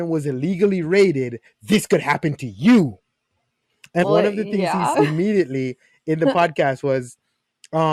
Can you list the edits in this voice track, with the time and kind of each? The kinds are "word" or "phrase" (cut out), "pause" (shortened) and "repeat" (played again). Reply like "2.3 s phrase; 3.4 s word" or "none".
4.0 s word; 4.9 s word